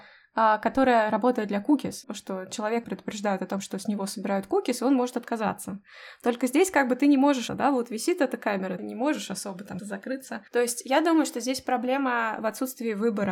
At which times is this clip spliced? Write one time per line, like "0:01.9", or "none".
0:02.0
0:02.8
0:07.5
0:08.8
0:09.8
0:10.5